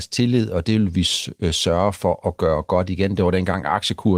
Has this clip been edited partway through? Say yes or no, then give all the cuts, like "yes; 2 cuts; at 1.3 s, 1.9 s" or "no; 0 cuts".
no; 0 cuts